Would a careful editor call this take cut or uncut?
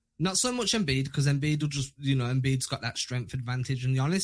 uncut